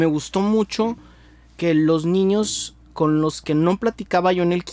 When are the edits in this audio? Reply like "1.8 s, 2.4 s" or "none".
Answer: none